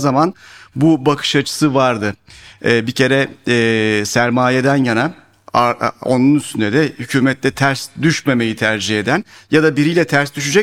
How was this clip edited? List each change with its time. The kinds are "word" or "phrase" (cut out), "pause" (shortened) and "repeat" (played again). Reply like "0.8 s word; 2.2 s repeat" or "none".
none